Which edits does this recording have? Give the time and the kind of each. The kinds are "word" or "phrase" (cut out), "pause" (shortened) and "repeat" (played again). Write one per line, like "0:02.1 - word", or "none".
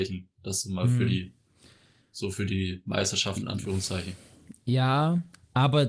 none

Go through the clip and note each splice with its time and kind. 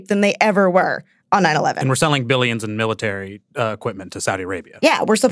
none

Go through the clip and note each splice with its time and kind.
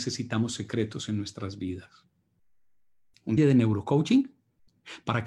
0:03.4 - word

